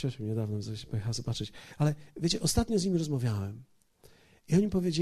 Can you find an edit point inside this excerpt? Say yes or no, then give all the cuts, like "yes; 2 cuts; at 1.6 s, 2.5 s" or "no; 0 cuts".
no; 0 cuts